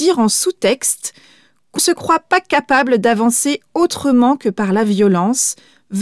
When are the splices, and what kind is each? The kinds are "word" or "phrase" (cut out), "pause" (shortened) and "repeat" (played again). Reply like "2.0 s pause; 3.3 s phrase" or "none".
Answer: 1.8 s word